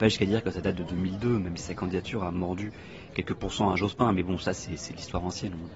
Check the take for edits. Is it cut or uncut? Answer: uncut